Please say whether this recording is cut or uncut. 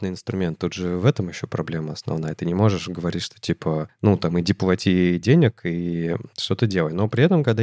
uncut